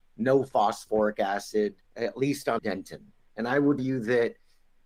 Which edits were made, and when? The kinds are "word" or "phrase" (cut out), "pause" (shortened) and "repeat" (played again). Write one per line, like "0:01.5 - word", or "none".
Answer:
0:01.8 - pause
0:02.6 - word
0:03.3 - word
0:03.8 - word